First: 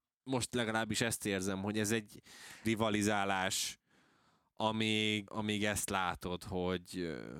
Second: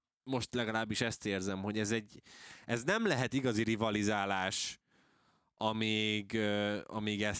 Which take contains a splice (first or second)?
first